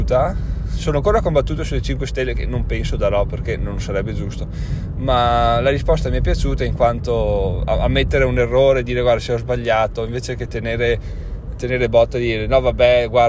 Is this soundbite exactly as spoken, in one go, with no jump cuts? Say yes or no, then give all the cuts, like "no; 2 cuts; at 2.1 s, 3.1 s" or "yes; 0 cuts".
yes; 0 cuts